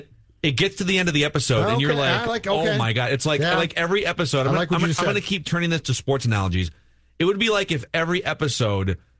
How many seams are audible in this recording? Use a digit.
0